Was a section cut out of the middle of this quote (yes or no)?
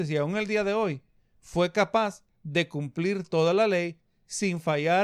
no